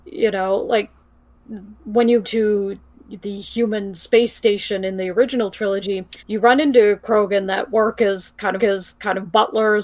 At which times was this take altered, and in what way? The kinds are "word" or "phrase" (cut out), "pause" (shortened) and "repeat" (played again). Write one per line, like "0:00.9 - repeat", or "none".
0:01.8 - pause
0:02.2 - word
0:06.2 - pause
0:08.6 - repeat